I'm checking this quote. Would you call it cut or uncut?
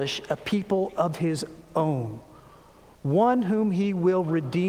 uncut